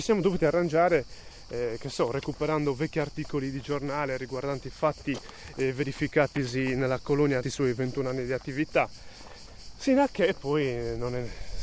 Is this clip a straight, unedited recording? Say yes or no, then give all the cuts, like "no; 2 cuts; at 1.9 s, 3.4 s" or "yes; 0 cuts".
no; 1 cut; at 7.4 s